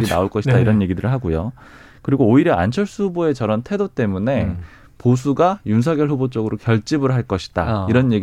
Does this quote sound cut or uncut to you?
uncut